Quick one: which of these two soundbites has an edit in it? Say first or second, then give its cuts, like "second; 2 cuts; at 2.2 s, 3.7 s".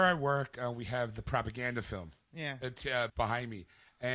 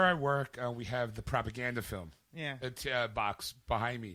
first; 1 cut; at 3.1 s